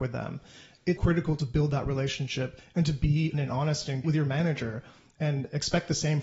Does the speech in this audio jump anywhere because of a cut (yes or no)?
yes